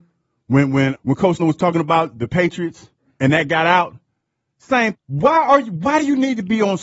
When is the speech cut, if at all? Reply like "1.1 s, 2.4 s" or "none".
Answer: 0.9 s, 1.4 s, 4.9 s